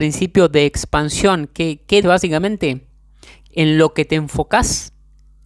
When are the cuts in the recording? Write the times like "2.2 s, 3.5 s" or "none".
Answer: 2.0 s, 3.5 s

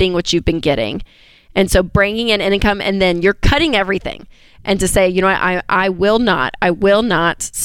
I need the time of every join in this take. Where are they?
none

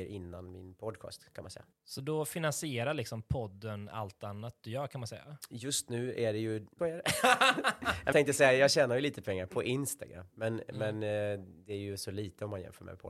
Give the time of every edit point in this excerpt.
1.7 s, 6.8 s, 8.1 s, 9.5 s

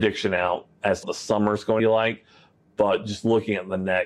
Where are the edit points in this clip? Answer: 1.0 s, 1.8 s

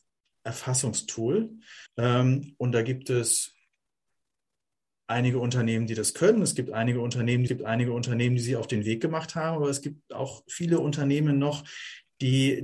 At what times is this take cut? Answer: 1.9 s, 7.5 s

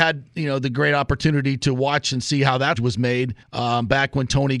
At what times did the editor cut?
2.8 s, 3.4 s

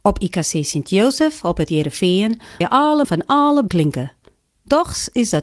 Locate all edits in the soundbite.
2.6 s, 3.0 s, 3.7 s

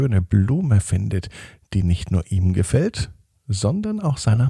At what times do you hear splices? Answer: none

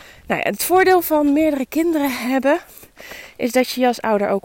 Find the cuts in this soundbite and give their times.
none

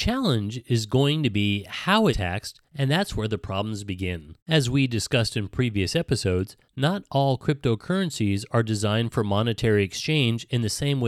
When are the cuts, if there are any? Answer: 2.1 s, 2.7 s, 4.4 s, 6.6 s

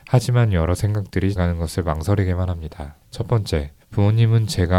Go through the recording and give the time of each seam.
1.4 s, 3.0 s, 3.8 s

